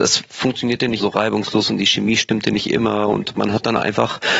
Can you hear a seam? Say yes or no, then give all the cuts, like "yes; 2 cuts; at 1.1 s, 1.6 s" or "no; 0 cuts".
yes; 1 cut; at 1.0 s